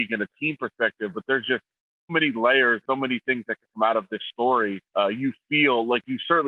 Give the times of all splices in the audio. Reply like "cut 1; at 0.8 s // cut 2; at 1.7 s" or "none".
cut 1; at 2.1 s // cut 2; at 2.8 s // cut 3; at 4.9 s